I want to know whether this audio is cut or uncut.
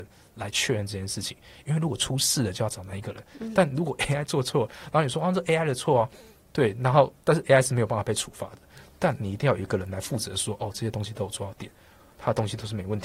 uncut